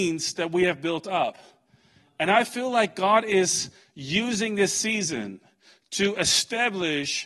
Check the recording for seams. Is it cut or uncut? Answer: uncut